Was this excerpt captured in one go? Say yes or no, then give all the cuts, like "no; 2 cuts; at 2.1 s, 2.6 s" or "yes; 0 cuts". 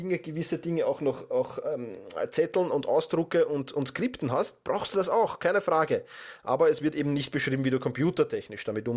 yes; 0 cuts